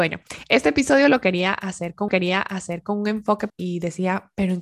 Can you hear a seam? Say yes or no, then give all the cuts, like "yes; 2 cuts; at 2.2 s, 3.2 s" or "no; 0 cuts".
yes; 2 cuts; at 2.1 s, 3.5 s